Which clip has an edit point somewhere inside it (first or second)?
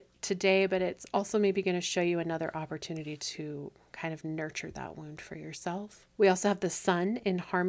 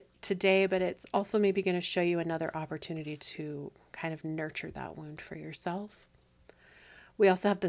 first